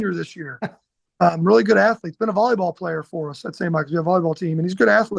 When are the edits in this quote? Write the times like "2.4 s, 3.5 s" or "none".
none